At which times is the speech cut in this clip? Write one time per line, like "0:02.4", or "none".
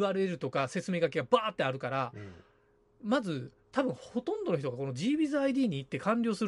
none